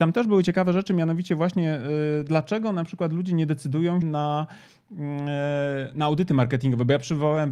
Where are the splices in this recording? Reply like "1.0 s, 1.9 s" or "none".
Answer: 4.0 s